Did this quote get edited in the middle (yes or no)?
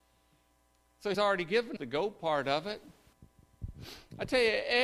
yes